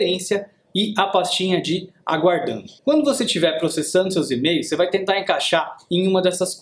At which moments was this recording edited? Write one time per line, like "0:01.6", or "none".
0:02.8